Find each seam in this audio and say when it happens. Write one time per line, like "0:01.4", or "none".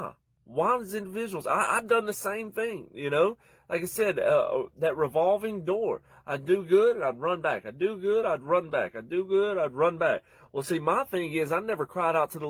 none